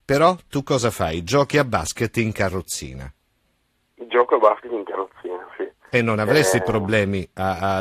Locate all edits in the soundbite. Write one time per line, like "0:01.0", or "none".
none